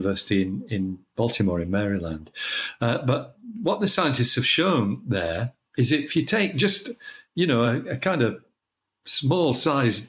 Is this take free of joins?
yes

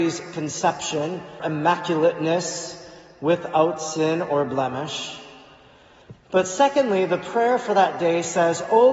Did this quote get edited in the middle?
yes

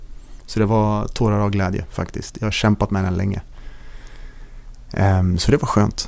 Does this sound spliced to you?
no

